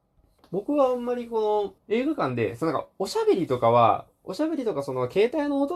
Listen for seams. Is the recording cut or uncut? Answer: cut